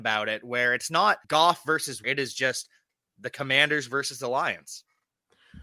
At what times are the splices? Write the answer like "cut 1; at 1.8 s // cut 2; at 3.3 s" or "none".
cut 1; at 1.2 s // cut 2; at 2.0 s

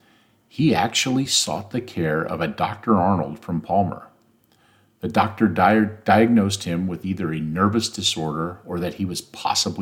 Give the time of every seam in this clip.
none

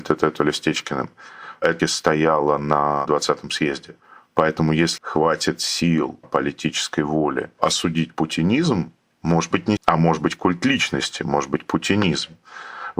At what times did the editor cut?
cut 1; at 1.8 s // cut 2; at 5.0 s // cut 3; at 6.2 s // cut 4; at 9.8 s

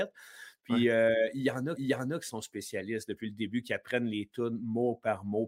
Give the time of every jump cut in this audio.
cut 1; at 1.8 s

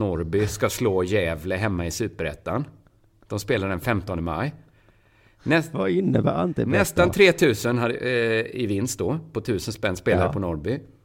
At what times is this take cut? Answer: none

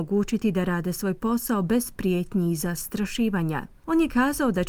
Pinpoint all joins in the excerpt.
none

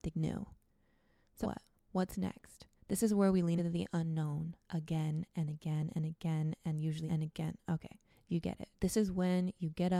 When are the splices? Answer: cut 1; at 1.4 s // cut 2; at 2.8 s // cut 3; at 3.6 s // cut 4; at 7.1 s // cut 5; at 8.1 s // cut 6; at 8.7 s

